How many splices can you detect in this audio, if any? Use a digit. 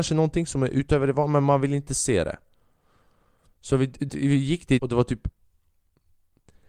2